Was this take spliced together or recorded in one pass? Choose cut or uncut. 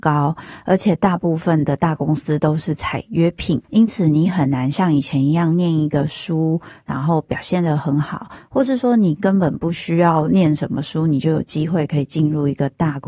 cut